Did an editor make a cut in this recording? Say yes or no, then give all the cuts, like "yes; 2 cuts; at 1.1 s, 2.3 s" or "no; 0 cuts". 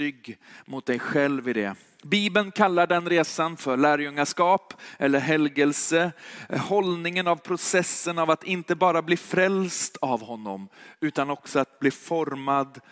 no; 0 cuts